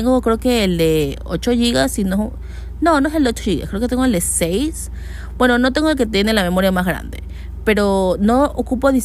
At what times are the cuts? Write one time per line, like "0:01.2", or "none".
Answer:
none